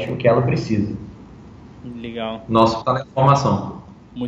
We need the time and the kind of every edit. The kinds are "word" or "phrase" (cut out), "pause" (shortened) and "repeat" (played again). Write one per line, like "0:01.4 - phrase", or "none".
0:02.8 - word